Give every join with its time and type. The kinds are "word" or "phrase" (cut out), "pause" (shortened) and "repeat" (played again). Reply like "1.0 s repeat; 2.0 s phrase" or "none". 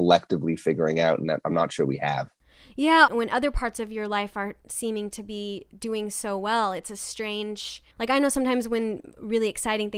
3.1 s word; 7.9 s pause